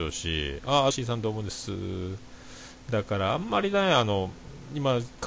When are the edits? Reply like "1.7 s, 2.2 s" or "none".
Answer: 0.9 s